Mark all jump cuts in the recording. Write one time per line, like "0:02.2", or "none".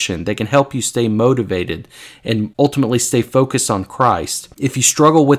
none